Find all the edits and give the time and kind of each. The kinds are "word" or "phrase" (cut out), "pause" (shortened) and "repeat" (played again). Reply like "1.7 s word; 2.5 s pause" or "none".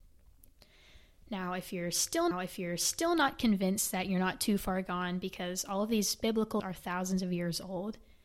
2.3 s repeat; 6.6 s word